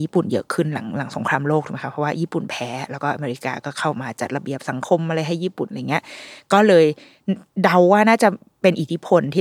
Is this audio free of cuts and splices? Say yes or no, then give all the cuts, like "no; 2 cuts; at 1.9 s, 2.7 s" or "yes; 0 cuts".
yes; 0 cuts